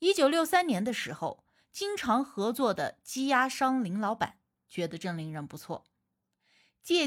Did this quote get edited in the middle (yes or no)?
no